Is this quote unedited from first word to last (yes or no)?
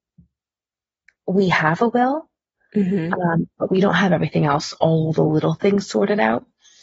yes